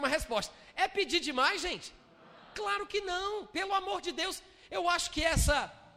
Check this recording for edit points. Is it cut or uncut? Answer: uncut